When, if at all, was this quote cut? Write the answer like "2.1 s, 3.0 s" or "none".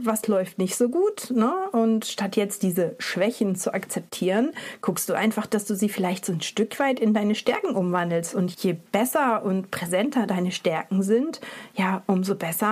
8.5 s